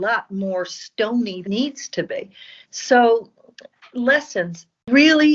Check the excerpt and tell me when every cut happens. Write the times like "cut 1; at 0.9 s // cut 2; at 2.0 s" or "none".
cut 1; at 1.4 s // cut 2; at 2.6 s

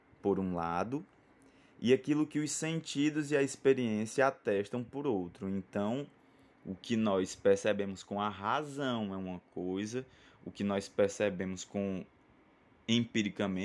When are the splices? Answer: none

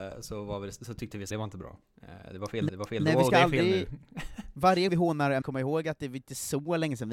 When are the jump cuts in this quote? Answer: cut 1; at 1.3 s // cut 2; at 2.7 s // cut 3; at 4.9 s // cut 4; at 5.4 s

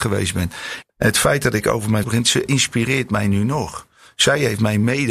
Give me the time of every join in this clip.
cut 1; at 2.0 s

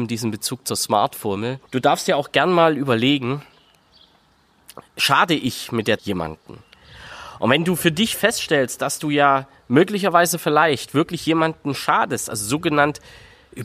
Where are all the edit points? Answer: cut 1; at 1.7 s // cut 2; at 4.9 s // cut 3; at 6.0 s

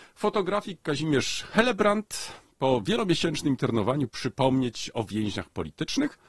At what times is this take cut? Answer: cut 1; at 4.1 s

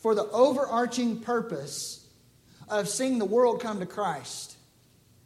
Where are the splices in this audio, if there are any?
none

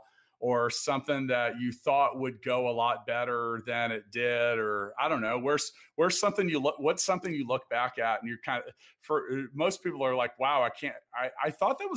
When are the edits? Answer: none

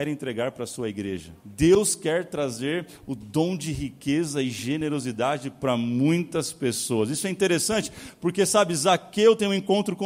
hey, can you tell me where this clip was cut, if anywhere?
cut 1; at 1.4 s

